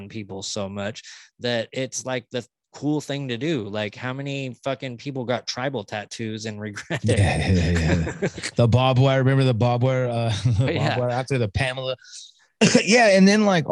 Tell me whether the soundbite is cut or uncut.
cut